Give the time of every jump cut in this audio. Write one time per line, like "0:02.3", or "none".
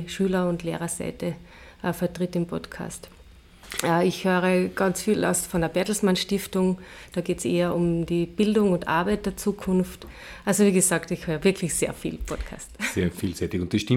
none